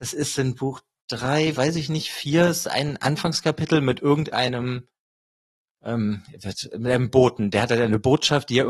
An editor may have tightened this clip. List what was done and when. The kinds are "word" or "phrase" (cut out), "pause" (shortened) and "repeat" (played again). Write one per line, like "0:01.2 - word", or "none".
none